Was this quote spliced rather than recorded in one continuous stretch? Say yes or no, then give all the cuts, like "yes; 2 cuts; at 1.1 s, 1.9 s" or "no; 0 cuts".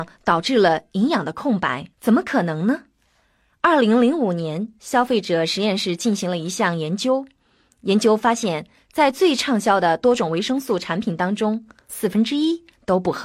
yes; 1 cut; at 1.9 s